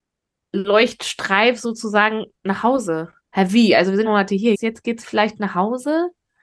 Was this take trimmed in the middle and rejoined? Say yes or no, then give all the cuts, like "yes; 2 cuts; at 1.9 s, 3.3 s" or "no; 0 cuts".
yes; 4 cuts; at 2.4 s, 3.2 s, 4.0 s, 4.5 s